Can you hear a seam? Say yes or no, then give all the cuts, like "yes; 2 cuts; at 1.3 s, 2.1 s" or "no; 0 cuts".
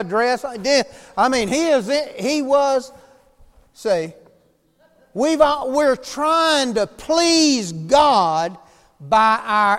no; 0 cuts